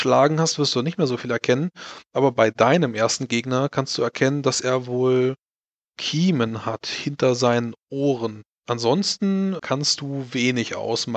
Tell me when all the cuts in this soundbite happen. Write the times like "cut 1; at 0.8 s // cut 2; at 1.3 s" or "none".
cut 1; at 9.6 s